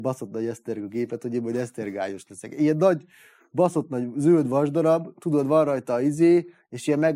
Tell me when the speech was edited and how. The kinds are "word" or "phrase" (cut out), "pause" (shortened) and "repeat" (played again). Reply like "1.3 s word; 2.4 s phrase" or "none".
none